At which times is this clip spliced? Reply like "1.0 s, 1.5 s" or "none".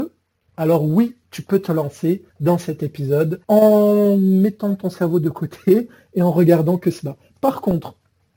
1.2 s, 2.3 s, 3.4 s